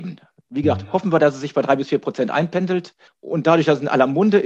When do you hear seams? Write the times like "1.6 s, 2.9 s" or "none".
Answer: 3.1 s